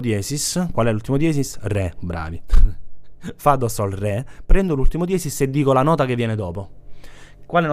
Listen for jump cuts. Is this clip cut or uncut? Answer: uncut